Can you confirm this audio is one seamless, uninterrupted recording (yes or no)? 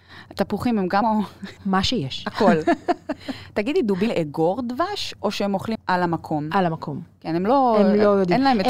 no